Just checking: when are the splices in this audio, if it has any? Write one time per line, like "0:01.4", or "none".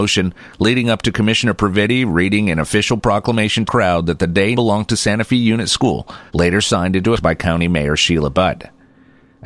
0:03.7
0:04.5
0:06.3
0:07.1